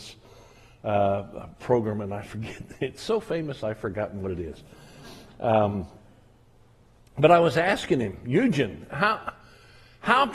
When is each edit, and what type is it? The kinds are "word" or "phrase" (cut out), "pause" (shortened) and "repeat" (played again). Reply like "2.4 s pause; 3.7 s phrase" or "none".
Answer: none